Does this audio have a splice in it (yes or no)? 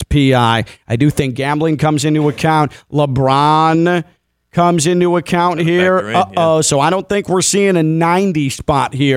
no